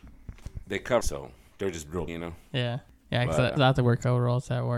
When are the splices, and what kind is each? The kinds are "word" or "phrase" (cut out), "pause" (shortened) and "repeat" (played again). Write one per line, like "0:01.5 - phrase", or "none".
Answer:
0:01.0 - word
0:02.1 - word
0:03.6 - word